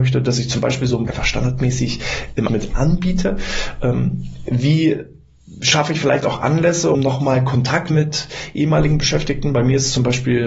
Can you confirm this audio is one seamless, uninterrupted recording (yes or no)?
no